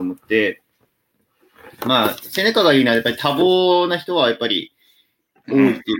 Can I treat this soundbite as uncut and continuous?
yes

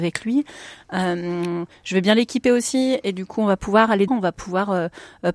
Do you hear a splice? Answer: yes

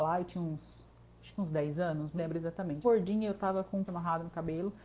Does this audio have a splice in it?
yes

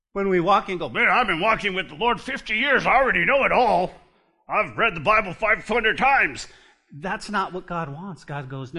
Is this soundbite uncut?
yes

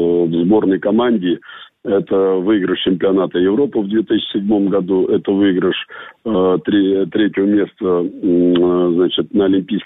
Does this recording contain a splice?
no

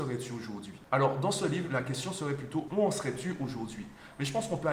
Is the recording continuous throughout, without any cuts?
yes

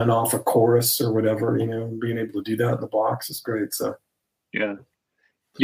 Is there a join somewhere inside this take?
no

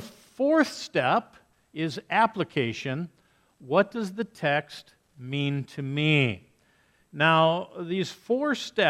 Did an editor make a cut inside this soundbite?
no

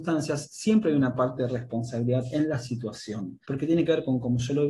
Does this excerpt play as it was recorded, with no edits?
no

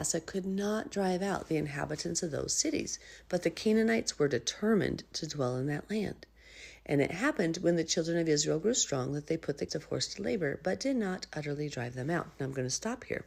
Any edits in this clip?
yes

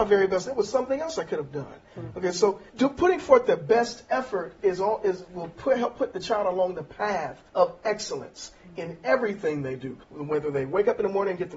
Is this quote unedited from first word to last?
no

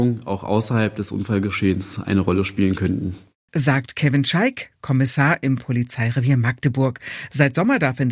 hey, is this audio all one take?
yes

